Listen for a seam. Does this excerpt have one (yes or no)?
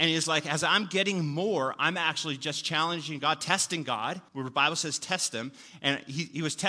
yes